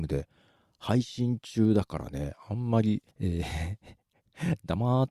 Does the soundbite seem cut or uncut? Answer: cut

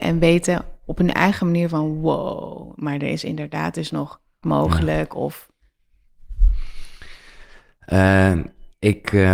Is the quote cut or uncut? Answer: cut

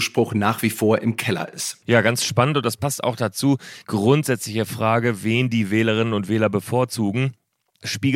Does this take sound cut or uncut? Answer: cut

